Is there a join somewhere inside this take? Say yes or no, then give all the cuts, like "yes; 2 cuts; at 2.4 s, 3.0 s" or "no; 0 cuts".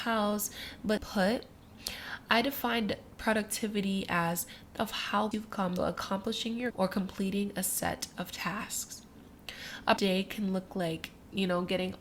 yes; 6 cuts; at 1.0 s, 4.8 s, 5.3 s, 5.8 s, 6.7 s, 10.0 s